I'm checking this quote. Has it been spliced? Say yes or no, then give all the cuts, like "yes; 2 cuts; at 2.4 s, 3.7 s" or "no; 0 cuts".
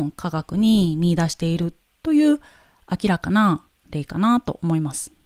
no; 0 cuts